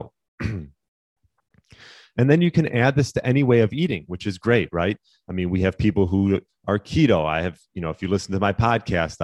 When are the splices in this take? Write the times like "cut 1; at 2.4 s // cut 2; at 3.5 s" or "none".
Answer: none